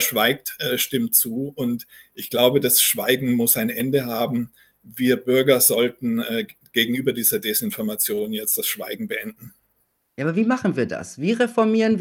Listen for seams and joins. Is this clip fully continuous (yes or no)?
yes